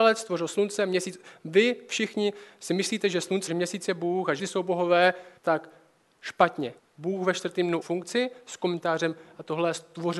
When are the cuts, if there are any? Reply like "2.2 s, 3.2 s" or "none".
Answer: 3.5 s, 4.4 s, 5.4 s, 6.8 s, 7.8 s